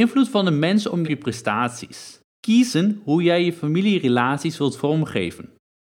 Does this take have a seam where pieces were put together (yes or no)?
yes